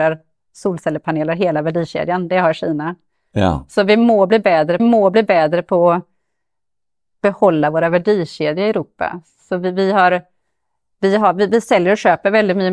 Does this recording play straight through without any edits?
no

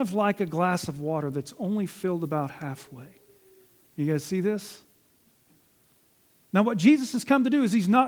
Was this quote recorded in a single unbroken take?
yes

